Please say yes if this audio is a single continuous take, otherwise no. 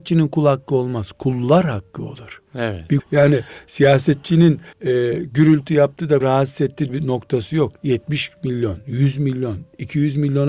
no